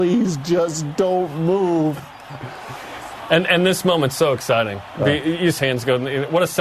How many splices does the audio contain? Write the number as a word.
one